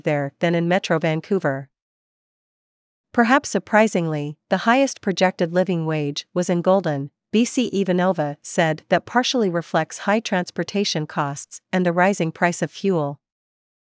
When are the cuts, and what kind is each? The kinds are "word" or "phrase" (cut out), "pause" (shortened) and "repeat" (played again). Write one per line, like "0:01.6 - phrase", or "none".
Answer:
none